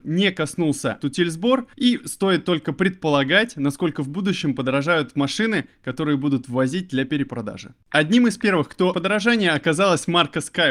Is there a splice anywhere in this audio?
yes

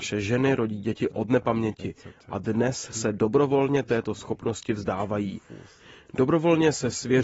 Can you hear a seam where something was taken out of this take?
no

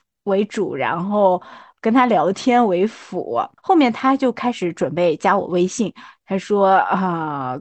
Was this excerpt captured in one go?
yes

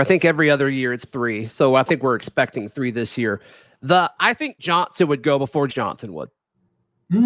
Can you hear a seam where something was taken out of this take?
yes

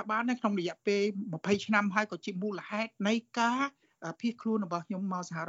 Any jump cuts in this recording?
yes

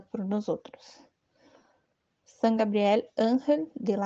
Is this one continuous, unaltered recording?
yes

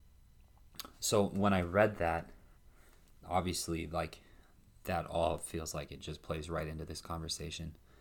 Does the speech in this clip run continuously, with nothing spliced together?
yes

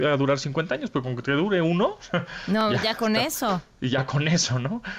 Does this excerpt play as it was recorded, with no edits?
yes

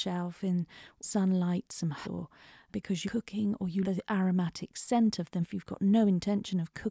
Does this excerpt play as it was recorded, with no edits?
no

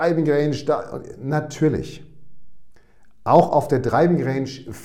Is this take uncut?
yes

